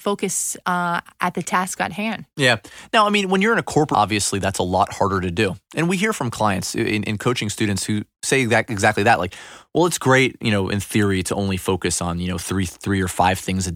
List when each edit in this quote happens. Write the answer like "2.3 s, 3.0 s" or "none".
3.9 s